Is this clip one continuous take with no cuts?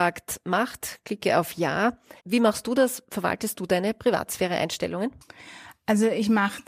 no; 1 cut; at 2.2 s

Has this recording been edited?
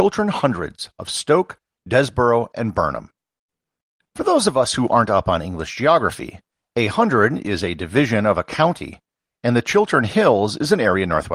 no; 0 cuts

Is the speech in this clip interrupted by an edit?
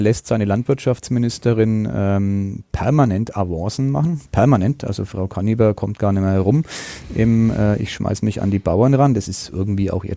no; 0 cuts

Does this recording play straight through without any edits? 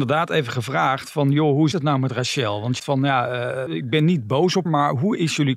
no; 4 cuts; at 1.7 s, 2.8 s, 3.7 s, 4.7 s

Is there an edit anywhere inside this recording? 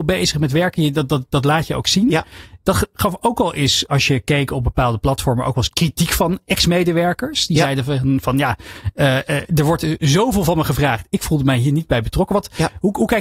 no; 0 cuts

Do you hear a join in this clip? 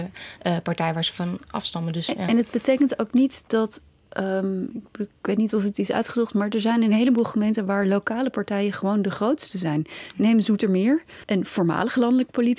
no; 0 cuts

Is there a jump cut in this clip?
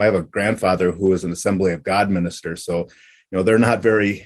no; 0 cuts

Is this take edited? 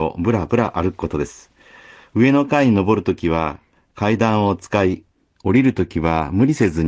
no; 0 cuts

